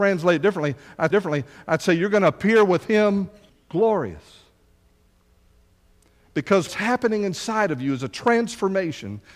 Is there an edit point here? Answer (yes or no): yes